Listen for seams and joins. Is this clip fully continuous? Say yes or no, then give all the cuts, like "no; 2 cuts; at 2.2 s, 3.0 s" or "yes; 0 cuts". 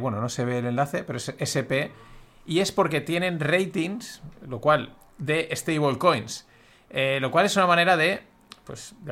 yes; 0 cuts